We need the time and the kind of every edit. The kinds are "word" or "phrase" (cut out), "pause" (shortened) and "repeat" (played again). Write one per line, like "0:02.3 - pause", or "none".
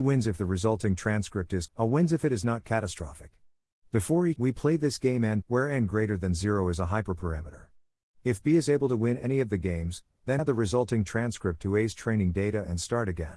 0:01.7 - word
0:04.4 - word
0:05.4 - word
0:10.4 - word